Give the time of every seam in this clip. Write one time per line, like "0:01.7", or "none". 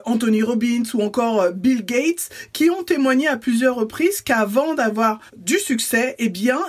0:05.3